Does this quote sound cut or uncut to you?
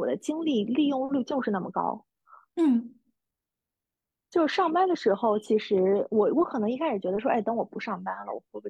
cut